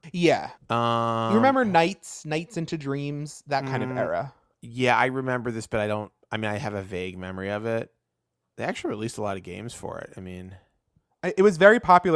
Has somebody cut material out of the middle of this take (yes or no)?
no